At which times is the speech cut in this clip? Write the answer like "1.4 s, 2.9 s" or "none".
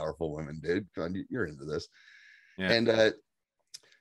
none